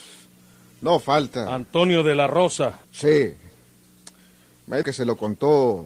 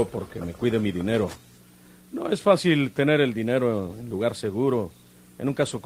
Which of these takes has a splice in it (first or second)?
first